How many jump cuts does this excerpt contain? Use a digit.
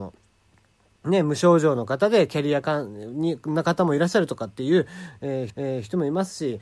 1